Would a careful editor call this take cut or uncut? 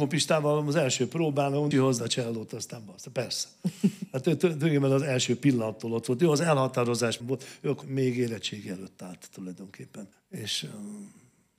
cut